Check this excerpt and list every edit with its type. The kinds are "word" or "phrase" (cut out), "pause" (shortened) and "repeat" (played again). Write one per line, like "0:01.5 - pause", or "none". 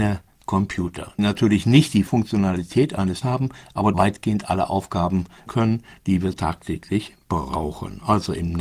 0:01.2 - word
0:02.1 - word
0:03.2 - word
0:03.9 - word
0:05.5 - word
0:06.3 - word